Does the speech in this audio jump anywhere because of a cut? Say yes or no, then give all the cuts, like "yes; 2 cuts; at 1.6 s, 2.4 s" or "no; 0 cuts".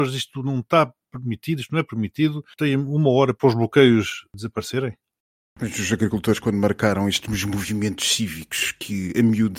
no; 0 cuts